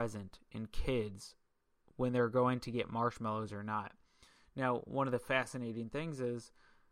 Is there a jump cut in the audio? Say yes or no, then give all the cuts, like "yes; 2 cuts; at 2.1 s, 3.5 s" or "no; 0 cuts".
no; 0 cuts